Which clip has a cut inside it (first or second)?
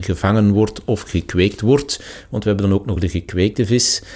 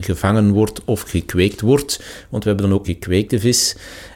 second